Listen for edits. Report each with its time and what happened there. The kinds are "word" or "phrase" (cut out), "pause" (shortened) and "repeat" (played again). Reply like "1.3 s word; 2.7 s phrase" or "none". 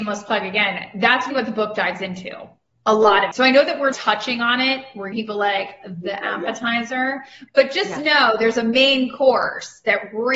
1.3 s word; 3.3 s word; 3.9 s word; 5.1 s word